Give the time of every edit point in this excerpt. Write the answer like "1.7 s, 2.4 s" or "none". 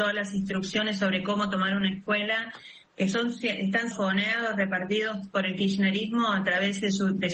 3.9 s